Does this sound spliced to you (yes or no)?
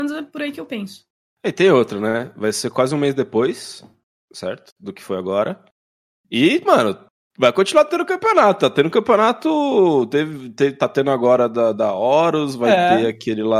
no